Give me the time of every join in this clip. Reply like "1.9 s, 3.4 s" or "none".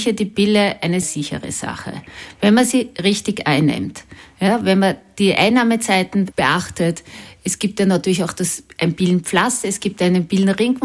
1.0 s, 6.3 s